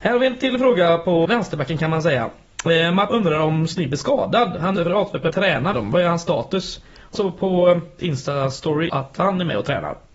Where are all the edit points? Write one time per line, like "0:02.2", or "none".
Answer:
0:01.2
0:03.1
0:04.8
0:05.3
0:05.7
0:07.1
0:08.0
0:08.9